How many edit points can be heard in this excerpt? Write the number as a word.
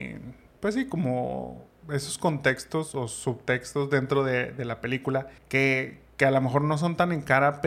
one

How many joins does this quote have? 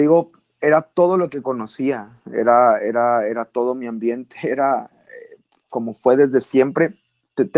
zero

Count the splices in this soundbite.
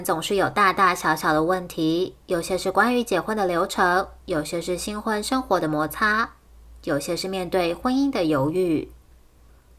one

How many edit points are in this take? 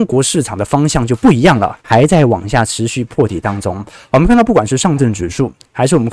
one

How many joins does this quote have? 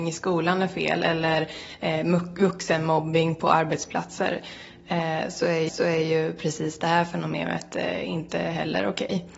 one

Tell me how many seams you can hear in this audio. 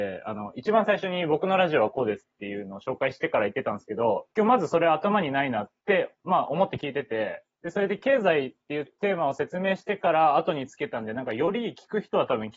three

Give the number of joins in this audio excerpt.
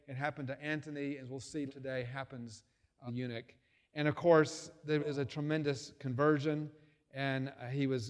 three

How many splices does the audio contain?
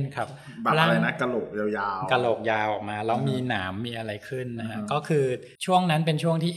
one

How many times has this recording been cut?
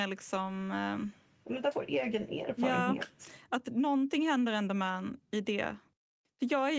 one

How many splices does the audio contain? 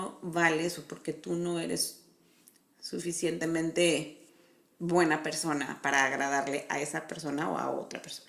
zero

